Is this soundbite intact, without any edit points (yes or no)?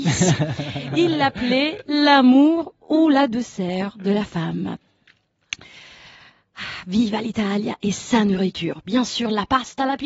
yes